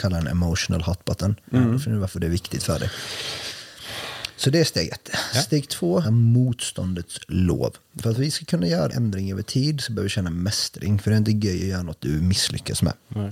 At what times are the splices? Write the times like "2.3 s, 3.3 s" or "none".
6.0 s, 8.9 s